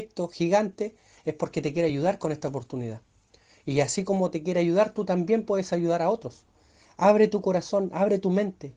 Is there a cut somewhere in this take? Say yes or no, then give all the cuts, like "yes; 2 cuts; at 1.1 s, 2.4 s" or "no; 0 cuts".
no; 0 cuts